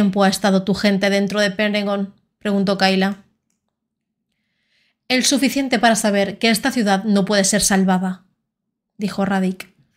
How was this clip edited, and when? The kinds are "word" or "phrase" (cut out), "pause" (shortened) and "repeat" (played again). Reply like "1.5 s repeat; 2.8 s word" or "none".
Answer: none